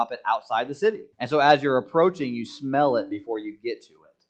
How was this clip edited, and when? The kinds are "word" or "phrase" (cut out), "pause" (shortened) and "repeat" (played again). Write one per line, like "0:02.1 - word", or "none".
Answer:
0:01.1 - pause